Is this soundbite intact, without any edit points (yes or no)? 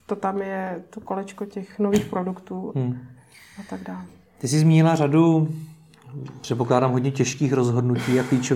yes